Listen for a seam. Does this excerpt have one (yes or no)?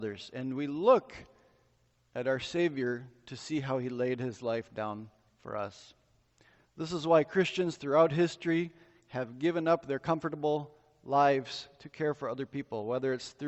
no